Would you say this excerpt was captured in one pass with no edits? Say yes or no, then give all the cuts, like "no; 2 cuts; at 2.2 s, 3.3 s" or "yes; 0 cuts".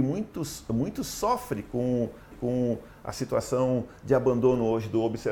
no; 1 cut; at 2.3 s